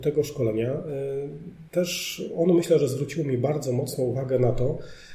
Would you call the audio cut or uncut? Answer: cut